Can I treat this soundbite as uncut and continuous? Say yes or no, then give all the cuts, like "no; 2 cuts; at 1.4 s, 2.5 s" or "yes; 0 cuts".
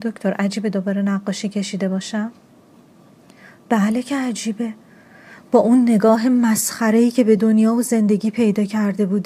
yes; 0 cuts